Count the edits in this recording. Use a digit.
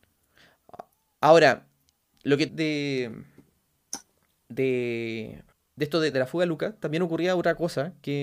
4